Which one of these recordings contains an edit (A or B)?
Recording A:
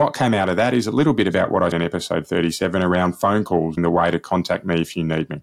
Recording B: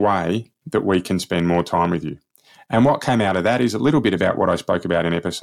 A